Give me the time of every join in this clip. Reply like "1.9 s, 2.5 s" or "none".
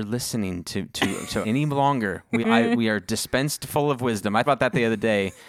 1.4 s, 2.4 s, 4.5 s